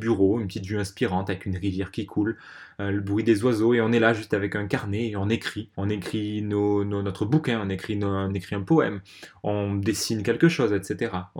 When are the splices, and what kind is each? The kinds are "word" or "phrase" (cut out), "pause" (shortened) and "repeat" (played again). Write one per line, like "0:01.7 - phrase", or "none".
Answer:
0:05.7 - pause